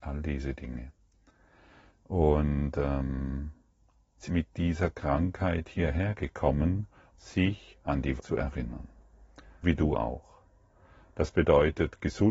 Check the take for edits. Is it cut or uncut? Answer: cut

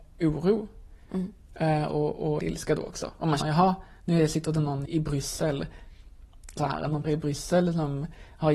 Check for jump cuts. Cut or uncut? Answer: cut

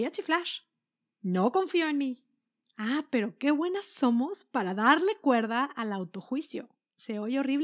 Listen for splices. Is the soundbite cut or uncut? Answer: uncut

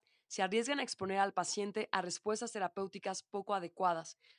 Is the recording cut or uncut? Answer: uncut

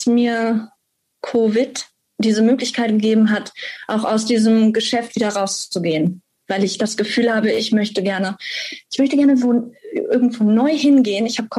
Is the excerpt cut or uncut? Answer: uncut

